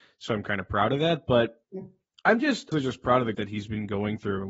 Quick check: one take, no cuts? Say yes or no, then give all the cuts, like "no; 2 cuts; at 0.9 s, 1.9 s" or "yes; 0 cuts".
no; 2 cuts; at 2.7 s, 3.3 s